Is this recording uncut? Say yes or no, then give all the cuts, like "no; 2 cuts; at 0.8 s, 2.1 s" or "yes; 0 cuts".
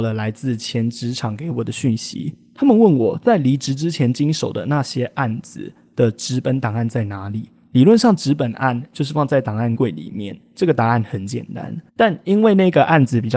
no; 1 cut; at 11.9 s